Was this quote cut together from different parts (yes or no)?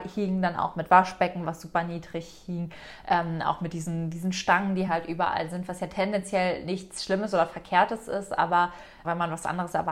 no